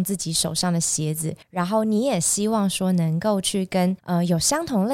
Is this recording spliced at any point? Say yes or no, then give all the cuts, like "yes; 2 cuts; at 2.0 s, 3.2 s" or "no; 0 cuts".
yes; 2 cuts; at 1.4 s, 4.0 s